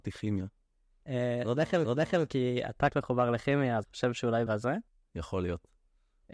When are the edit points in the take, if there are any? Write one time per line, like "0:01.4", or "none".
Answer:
0:01.8
0:02.9
0:03.8
0:04.5